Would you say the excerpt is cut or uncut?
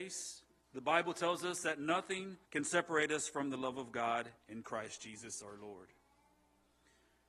cut